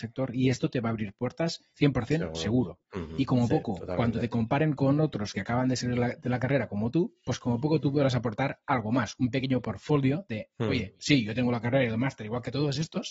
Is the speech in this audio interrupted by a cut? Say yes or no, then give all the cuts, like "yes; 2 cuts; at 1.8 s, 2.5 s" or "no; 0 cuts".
yes; 1 cut; at 1.7 s